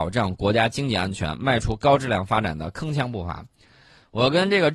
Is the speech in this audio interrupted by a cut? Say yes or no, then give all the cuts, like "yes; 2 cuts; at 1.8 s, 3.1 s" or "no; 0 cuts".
no; 0 cuts